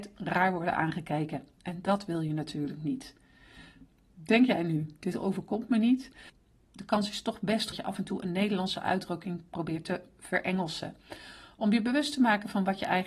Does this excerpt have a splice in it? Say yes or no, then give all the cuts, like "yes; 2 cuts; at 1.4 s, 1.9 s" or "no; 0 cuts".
yes; 1 cut; at 7.7 s